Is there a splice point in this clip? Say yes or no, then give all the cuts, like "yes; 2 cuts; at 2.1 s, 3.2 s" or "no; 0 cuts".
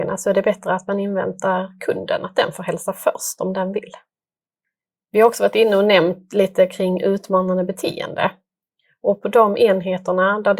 no; 0 cuts